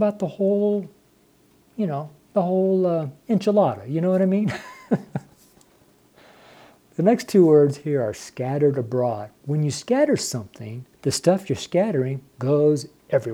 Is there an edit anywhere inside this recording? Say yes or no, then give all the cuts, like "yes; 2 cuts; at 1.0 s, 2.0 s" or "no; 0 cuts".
yes; 3 cuts; at 5.3 s, 9.4 s, 10.9 s